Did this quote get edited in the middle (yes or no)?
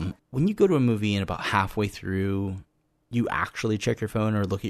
no